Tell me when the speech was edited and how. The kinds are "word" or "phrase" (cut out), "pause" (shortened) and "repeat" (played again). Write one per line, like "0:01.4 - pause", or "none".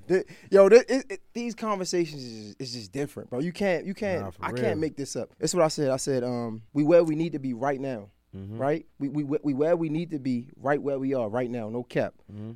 0:05.3 - pause
0:06.7 - pause
0:08.9 - pause